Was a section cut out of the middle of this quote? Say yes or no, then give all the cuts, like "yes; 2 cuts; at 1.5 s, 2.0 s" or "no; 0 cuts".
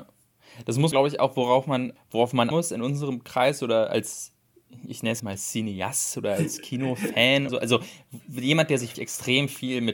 yes; 6 cuts; at 0.9 s, 2.0 s, 2.5 s, 5.2 s, 7.5 s, 8.9 s